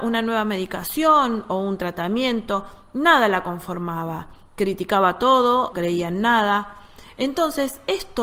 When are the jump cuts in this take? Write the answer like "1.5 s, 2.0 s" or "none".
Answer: 5.7 s